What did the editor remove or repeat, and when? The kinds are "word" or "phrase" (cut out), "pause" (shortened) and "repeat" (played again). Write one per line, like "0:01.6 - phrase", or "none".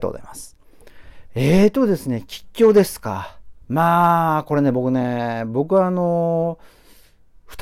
0:03.6 - pause